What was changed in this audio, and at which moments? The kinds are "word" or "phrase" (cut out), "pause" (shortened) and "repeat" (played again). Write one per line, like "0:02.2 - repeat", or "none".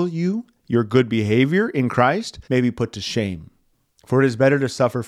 0:02.4 - pause
0:03.7 - pause